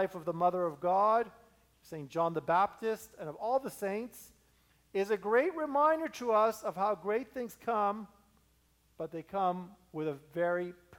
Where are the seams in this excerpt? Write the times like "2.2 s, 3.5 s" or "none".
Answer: none

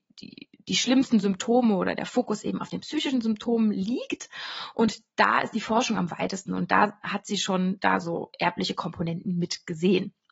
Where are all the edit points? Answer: none

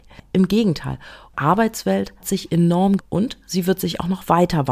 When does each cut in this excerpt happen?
1.3 s, 2.2 s, 3.0 s

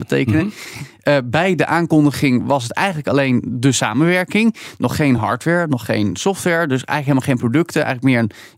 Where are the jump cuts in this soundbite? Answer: none

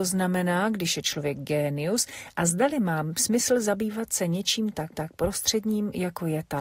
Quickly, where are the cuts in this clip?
4.9 s

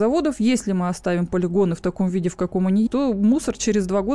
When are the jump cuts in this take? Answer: 2.9 s

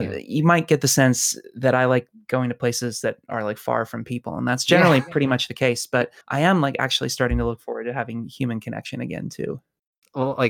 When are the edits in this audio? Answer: 6.2 s

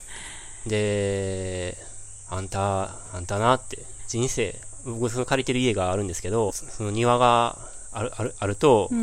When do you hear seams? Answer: 4.0 s, 6.5 s

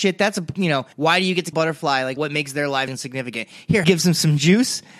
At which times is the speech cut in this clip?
0.9 s, 1.5 s, 2.2 s, 2.9 s, 3.8 s

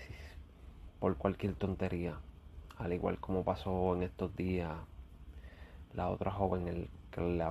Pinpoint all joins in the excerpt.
6.6 s

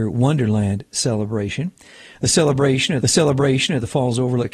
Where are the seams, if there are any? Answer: 3.0 s

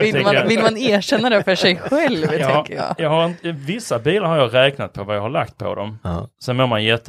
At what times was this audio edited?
none

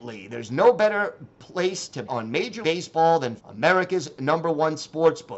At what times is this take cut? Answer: 2.1 s, 2.6 s, 3.4 s

